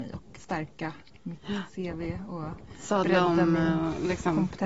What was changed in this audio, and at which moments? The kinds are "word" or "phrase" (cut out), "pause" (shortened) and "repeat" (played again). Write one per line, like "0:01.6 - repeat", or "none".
none